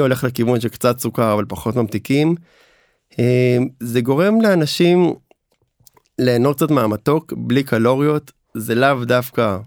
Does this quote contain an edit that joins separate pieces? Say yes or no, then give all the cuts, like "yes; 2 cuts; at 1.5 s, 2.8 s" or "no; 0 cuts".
no; 0 cuts